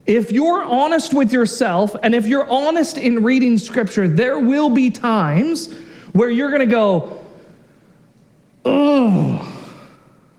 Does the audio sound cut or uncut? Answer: uncut